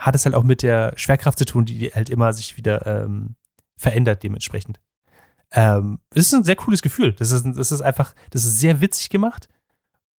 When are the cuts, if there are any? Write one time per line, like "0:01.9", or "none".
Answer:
none

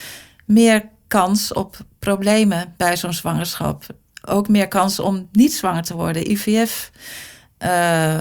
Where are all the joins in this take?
none

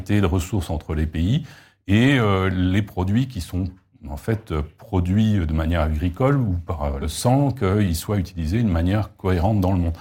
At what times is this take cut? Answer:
0:07.0

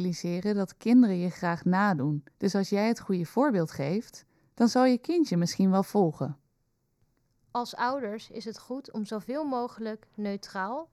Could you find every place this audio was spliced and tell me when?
0:02.3

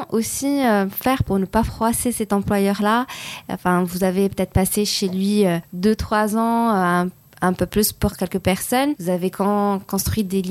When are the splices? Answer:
none

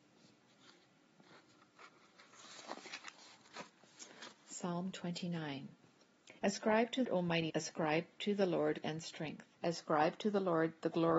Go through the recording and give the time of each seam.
0:06.4
0:07.0
0:07.5
0:08.8
0:09.5

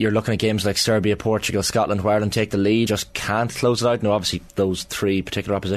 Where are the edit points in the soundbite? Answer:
0:02.9
0:04.5

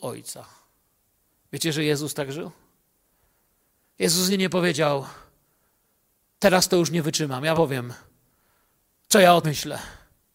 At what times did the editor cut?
0:04.3
0:07.5
0:09.4

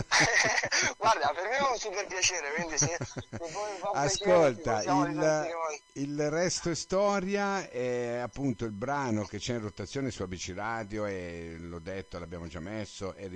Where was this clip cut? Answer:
none

